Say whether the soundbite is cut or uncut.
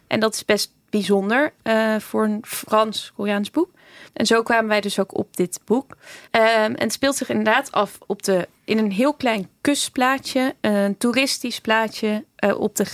cut